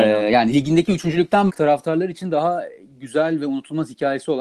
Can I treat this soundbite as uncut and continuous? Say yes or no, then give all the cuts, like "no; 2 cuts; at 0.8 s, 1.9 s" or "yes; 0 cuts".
no; 1 cut; at 1.5 s